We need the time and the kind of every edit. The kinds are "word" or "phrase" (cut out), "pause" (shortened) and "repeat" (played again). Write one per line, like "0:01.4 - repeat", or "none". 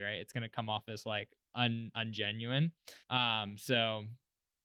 0:03.0 - pause